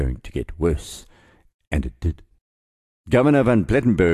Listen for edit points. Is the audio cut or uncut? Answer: uncut